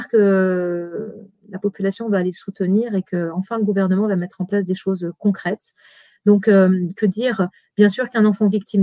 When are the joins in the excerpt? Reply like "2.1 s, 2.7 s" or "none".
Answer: none